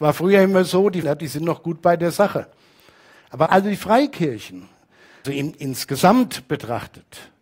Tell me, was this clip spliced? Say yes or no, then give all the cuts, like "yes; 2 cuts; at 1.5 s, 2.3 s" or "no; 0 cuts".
yes; 3 cuts; at 1.0 s, 3.5 s, 5.2 s